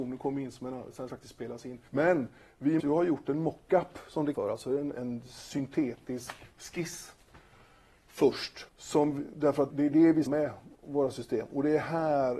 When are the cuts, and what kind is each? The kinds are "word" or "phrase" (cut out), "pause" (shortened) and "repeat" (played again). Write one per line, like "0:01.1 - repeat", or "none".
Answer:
0:01.1 - phrase
0:01.9 - pause
0:02.8 - word
0:04.3 - word
0:04.9 - word
0:06.5 - pause
0:08.7 - pause
0:09.7 - word
0:10.3 - phrase